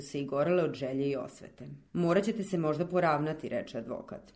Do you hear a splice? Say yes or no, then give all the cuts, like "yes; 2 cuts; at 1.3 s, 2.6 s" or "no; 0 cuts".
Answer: yes; 1 cut; at 1.9 s